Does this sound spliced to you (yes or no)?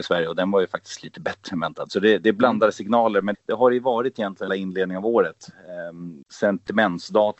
yes